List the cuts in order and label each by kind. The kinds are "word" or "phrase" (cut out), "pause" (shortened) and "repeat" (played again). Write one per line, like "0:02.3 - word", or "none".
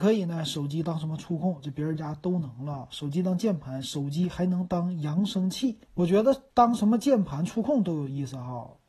0:05.8 - pause
0:06.5 - pause